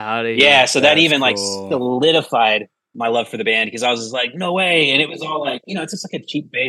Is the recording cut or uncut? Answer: uncut